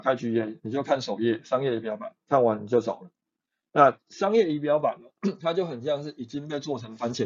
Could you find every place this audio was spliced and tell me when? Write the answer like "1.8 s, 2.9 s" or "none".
none